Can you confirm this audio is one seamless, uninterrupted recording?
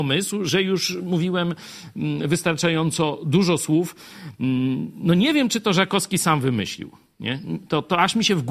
yes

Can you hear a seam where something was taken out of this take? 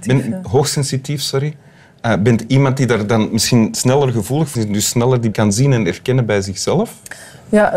yes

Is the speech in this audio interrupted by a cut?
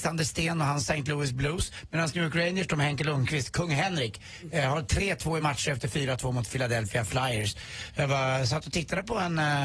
no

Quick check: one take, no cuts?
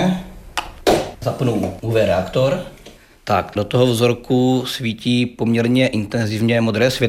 yes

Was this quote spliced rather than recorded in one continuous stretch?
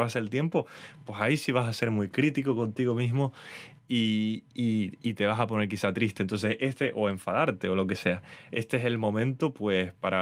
no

